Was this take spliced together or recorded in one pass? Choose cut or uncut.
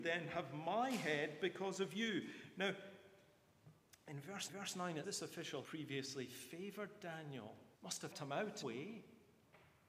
cut